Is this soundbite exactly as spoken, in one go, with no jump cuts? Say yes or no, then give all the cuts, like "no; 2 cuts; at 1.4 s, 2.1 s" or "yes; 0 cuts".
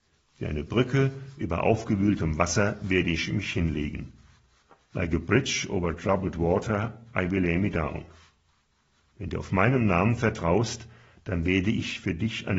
yes; 0 cuts